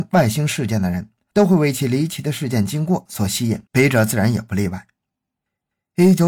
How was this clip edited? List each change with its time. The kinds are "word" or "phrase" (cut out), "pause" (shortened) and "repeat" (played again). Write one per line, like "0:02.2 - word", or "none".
0:03.7 - pause